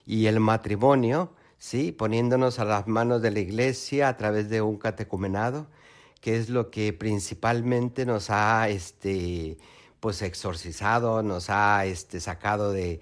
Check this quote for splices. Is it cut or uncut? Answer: uncut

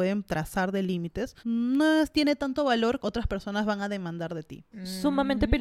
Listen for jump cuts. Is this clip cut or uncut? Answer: cut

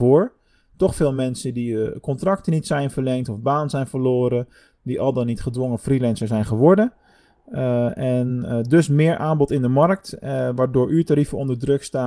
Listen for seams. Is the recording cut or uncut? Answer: uncut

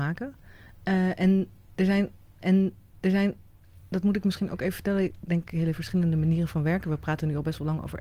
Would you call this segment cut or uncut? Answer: cut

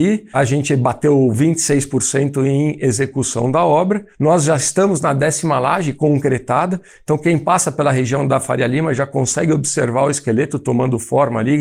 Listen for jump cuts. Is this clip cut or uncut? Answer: uncut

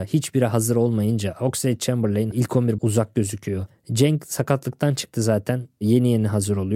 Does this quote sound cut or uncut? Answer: cut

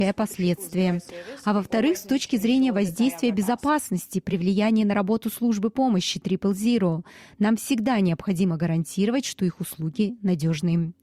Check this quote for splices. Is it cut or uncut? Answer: uncut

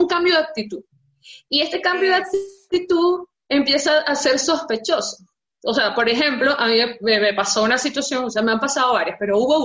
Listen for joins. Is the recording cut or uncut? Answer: uncut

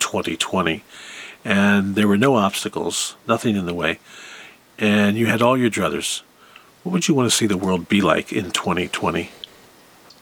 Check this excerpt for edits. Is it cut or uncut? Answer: cut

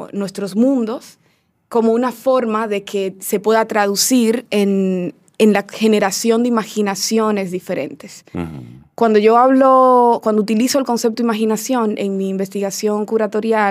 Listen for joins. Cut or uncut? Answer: uncut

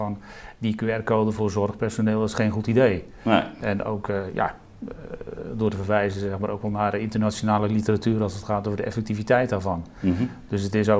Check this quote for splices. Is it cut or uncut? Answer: uncut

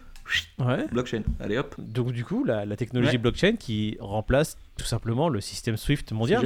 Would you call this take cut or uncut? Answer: uncut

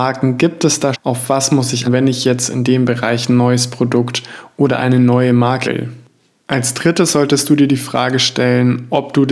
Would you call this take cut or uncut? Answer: cut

